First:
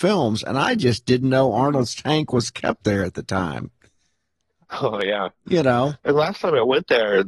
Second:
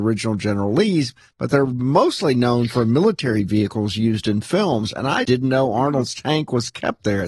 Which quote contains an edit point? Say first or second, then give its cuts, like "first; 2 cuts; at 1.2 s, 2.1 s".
second; 1 cut; at 5.2 s